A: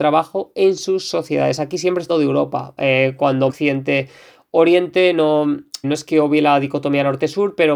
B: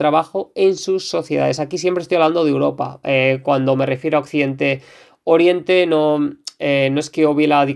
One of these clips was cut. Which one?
A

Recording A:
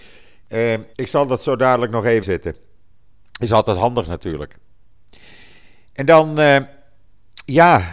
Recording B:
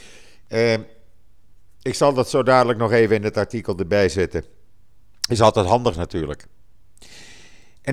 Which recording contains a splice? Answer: A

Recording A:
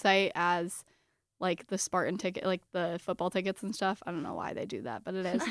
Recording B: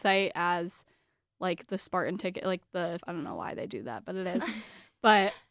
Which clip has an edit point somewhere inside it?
B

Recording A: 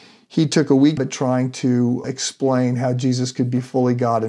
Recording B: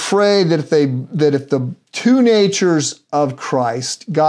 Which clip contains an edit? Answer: A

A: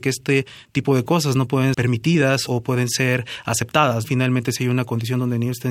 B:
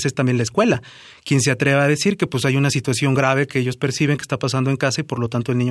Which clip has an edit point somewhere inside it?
A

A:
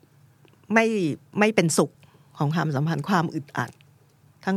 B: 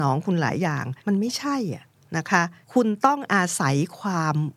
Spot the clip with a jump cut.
B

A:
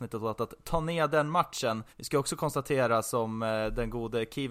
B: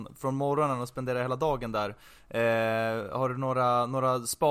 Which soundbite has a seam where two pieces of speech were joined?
A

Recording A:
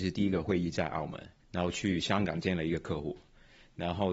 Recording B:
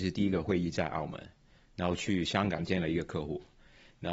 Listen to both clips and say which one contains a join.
A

